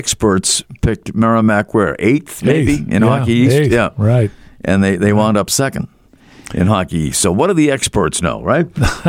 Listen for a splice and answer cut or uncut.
uncut